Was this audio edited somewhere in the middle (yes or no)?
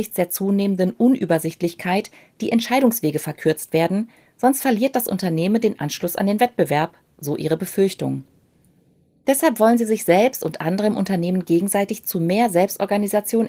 no